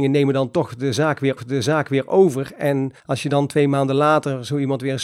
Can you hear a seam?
yes; 2 cuts; at 1.4 s, 3.0 s

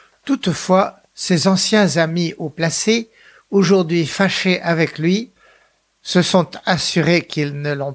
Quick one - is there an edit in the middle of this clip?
no; 0 cuts

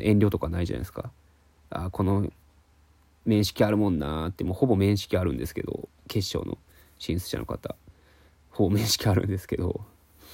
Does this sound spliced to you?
no; 0 cuts

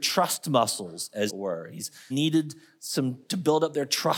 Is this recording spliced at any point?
yes; 2 cuts; at 1.3 s, 2.1 s

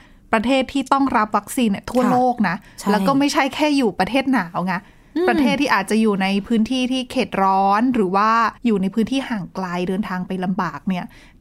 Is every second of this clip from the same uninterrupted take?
no; 1 cut; at 8.6 s

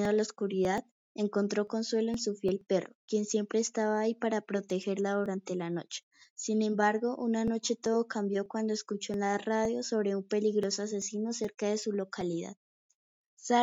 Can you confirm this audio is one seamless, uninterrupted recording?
yes; 0 cuts

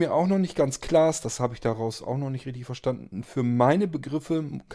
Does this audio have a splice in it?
no; 0 cuts

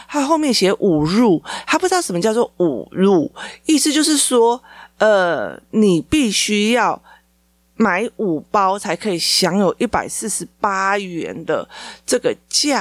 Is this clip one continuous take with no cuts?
yes; 0 cuts

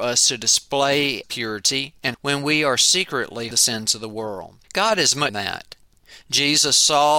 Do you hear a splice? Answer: yes; 5 cuts; at 1.2 s, 2.1 s, 3.5 s, 4.6 s, 5.3 s

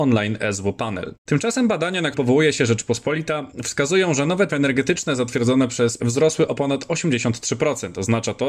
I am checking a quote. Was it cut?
yes; 3 cuts; at 2.1 s, 4.5 s, 6.0 s

